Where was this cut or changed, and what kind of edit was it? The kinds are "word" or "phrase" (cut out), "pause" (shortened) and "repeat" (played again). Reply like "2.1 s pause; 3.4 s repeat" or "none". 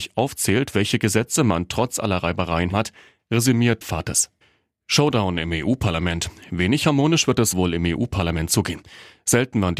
2.7 s word; 3.8 s word; 7.5 s word